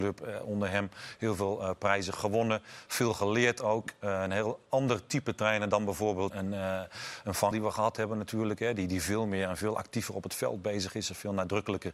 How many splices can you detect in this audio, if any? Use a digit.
2